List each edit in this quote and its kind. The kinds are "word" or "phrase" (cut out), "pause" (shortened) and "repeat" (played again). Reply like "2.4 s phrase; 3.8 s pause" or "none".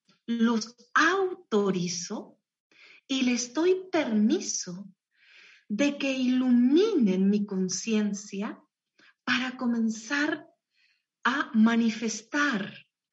none